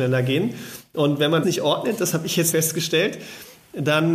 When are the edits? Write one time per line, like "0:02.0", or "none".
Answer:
0:01.4
0:02.5